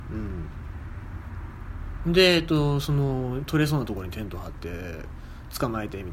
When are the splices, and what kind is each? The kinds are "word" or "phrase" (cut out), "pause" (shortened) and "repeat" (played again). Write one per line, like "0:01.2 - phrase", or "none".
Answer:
none